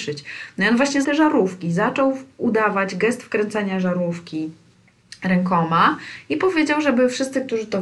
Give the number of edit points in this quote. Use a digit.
1